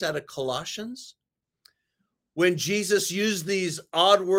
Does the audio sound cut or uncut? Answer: uncut